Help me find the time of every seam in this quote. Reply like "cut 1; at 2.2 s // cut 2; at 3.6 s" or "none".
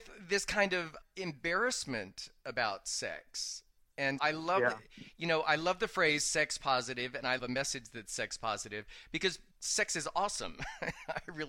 cut 1; at 4.2 s // cut 2; at 7.4 s